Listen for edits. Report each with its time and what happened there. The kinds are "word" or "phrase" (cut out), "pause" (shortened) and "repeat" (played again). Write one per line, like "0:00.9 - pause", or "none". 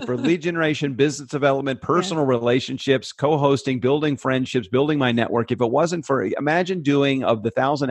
none